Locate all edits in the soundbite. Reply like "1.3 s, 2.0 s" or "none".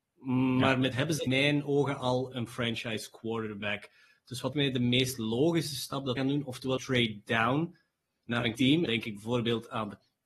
0.9 s, 1.3 s, 2.3 s, 4.5 s, 6.2 s, 6.8 s, 8.6 s, 8.9 s